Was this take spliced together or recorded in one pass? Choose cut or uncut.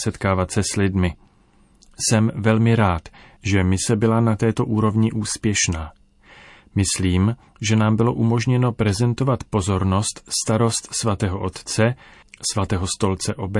uncut